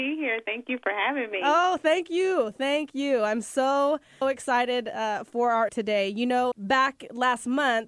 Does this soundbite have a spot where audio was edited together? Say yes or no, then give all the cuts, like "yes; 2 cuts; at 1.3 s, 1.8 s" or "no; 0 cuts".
yes; 3 cuts; at 4.2 s, 5.7 s, 6.5 s